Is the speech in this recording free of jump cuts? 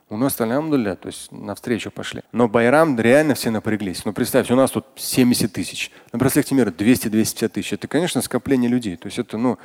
no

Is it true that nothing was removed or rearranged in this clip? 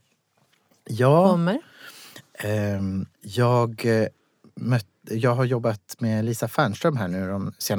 no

